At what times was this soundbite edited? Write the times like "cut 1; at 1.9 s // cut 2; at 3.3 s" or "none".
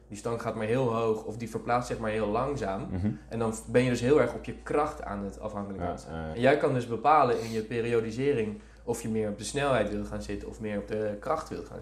cut 1; at 6.3 s